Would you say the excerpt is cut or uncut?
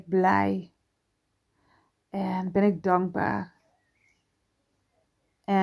uncut